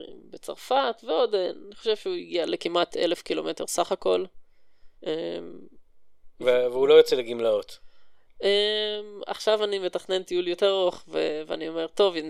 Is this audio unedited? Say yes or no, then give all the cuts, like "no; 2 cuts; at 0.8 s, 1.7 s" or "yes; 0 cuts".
no; 1 cut; at 5.0 s